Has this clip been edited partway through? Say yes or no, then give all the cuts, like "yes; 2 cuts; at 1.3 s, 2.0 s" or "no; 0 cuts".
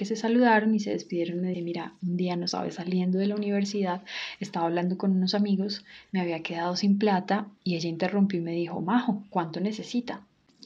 yes; 1 cut; at 1.5 s